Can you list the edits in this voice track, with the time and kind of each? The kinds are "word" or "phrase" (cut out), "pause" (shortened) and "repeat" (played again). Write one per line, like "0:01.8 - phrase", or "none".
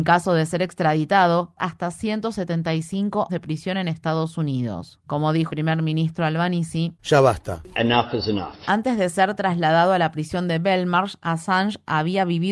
0:01.6 - phrase
0:03.3 - word
0:05.5 - word
0:07.0 - pause